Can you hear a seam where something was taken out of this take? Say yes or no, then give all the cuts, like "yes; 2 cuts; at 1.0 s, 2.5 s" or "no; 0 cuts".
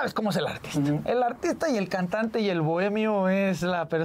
no; 0 cuts